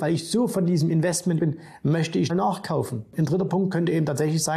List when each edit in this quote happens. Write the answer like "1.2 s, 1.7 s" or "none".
1.4 s, 2.3 s